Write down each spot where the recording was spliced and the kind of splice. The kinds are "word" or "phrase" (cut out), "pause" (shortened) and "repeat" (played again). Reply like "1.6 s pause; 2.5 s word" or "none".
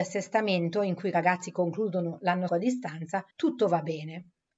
2.5 s word; 3.3 s pause